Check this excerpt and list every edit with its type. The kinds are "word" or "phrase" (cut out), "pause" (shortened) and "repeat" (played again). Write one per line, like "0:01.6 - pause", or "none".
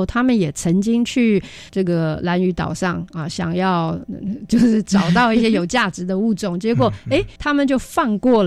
0:01.7 - word
0:07.4 - pause